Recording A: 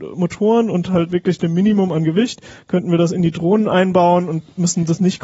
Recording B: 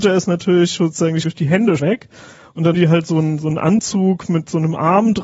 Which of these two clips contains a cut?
B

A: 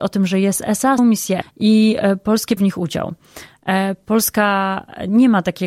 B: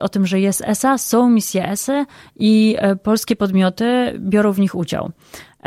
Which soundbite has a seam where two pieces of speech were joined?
A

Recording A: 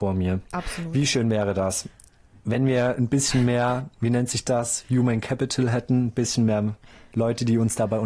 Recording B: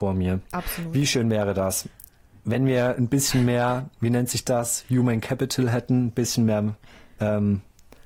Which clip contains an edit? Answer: A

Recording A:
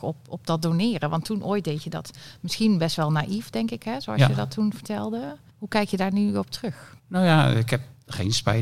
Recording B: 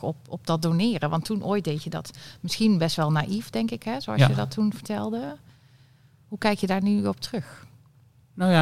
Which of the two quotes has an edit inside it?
A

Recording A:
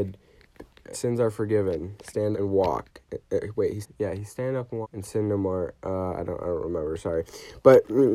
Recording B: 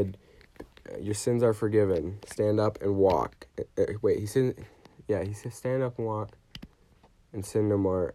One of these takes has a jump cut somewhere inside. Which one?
A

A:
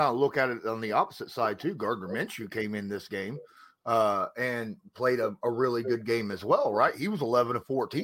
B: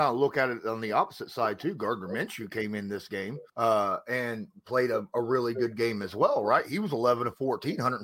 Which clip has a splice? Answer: B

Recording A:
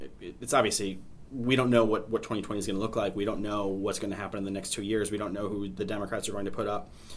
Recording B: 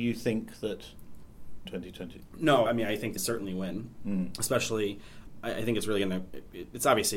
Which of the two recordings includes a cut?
B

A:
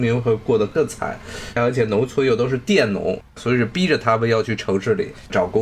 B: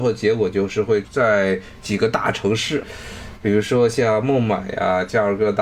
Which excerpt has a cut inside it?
A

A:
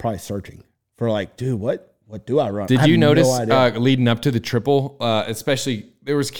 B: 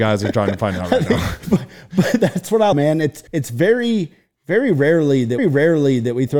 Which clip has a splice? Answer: B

